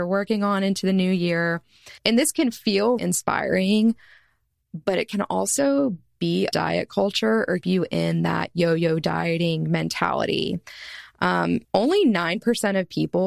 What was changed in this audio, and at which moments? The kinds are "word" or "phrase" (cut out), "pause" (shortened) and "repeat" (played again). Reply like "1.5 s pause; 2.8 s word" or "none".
2.0 s pause; 3.0 s word; 6.5 s phrase; 7.6 s word; 11.6 s pause

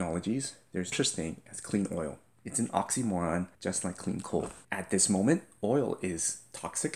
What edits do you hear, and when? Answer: 0.9 s word; 2.3 s pause; 3.5 s pause; 4.6 s pause

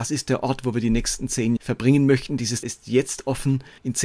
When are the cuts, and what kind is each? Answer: 1.6 s word; 2.6 s word

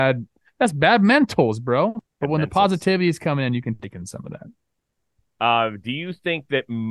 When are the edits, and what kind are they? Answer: 2.1 s pause

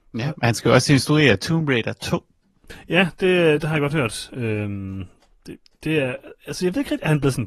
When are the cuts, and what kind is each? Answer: none

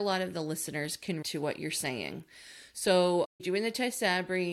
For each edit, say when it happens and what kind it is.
1.2 s word; 3.4 s word

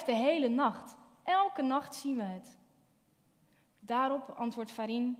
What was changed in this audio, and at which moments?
none

